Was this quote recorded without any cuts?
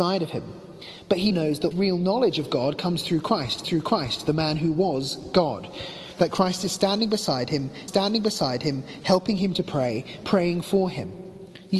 no; 4 cuts; at 1.3 s, 1.7 s, 3.6 s, 7.9 s

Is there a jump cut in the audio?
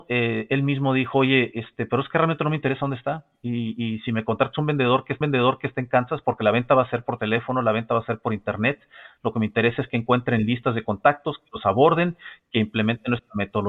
yes; 1 cut; at 5.2 s

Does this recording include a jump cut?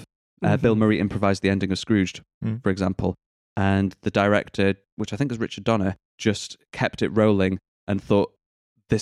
yes; 1 cut; at 6.1 s

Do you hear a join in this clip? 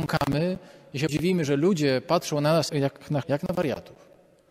yes; 3 cuts; at 1.1 s, 2.7 s, 3.2 s

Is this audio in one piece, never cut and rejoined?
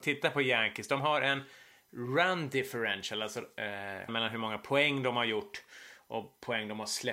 no; 1 cut; at 4.1 s

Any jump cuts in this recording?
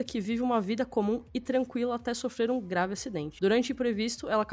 no; 0 cuts

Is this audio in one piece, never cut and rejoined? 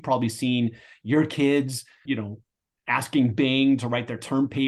no; 1 cut; at 2.1 s

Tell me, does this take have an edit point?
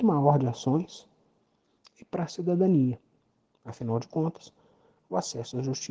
no; 0 cuts

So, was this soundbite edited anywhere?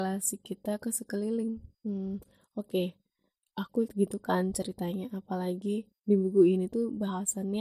yes; 2 cuts; at 1.7 s, 3.9 s

